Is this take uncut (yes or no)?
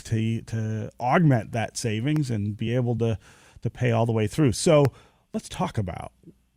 yes